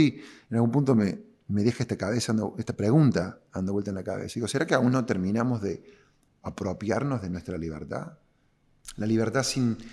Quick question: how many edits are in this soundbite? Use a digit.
0